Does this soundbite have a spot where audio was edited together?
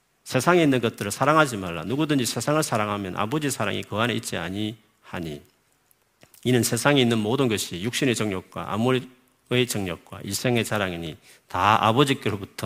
no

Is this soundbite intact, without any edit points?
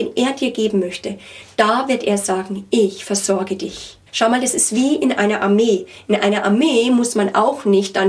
no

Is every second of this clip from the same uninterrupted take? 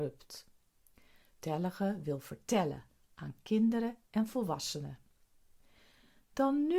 yes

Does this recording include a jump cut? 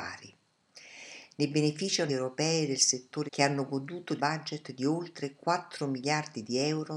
yes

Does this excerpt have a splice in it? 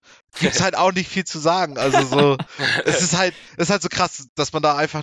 no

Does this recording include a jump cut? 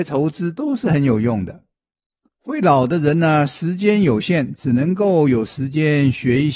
no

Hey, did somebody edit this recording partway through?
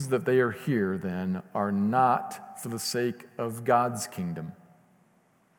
no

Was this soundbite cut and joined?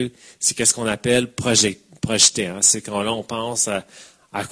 no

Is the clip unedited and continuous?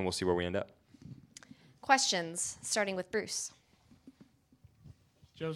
yes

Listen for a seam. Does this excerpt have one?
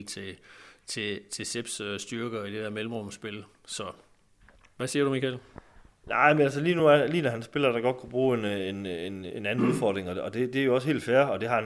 no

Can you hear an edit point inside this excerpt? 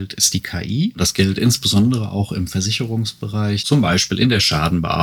no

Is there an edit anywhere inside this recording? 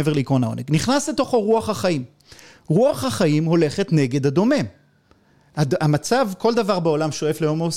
no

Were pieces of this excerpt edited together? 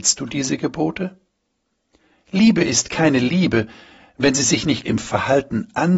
yes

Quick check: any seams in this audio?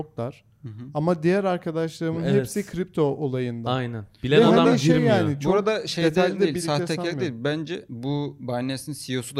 no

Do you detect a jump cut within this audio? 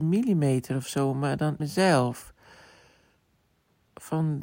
yes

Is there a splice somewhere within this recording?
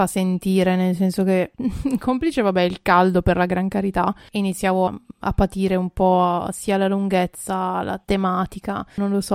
yes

